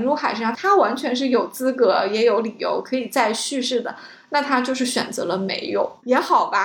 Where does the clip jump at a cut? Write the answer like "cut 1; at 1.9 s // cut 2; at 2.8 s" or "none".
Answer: none